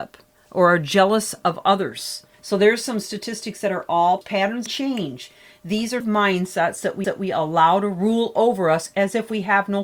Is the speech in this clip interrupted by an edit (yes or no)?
yes